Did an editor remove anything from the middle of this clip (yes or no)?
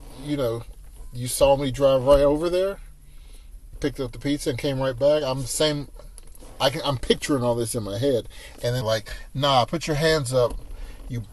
yes